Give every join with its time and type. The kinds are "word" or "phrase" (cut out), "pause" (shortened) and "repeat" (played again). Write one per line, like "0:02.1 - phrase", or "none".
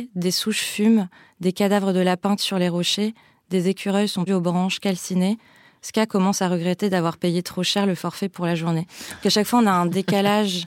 0:02.4 - word
0:04.3 - word